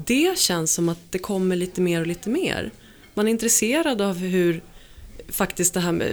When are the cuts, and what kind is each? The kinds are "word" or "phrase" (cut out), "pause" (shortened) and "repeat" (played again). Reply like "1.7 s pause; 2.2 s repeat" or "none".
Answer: none